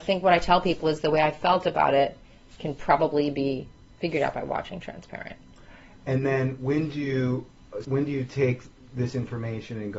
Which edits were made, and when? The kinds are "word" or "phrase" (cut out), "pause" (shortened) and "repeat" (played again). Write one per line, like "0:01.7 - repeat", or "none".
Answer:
0:07.8 - phrase

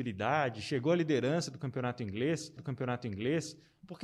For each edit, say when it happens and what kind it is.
0:02.6 - repeat

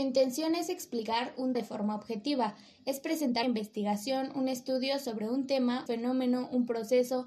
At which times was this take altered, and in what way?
0:01.5 - word
0:03.4 - word
0:05.9 - word

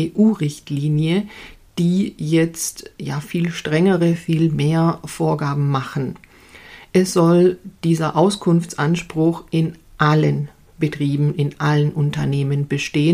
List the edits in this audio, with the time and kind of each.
none

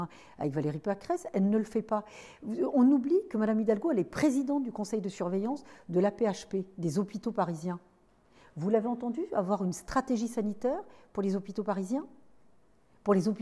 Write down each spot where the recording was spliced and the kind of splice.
none

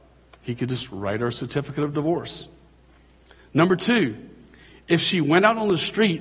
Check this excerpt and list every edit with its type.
none

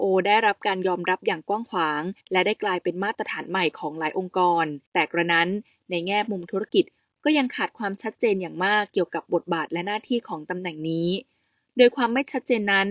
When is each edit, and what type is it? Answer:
0:02.2 - pause
0:04.9 - pause

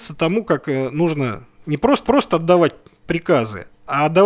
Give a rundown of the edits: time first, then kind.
0:01.6 - word
0:02.0 - repeat

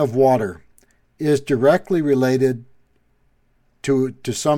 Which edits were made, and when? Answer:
none

